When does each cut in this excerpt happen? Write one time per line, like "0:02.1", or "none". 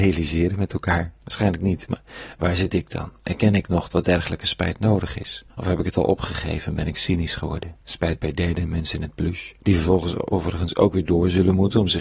0:01.2
0:05.5
0:07.8
0:09.6